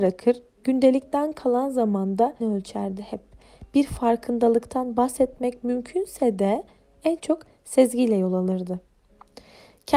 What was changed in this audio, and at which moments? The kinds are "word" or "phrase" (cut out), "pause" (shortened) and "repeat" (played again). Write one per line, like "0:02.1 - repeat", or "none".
0:02.4 - word